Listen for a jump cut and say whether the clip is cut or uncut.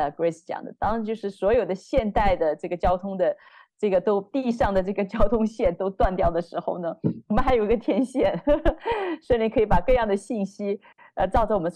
uncut